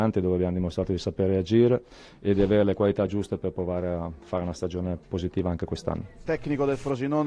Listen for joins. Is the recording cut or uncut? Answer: uncut